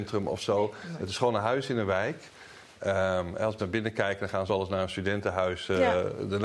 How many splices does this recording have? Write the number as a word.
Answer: two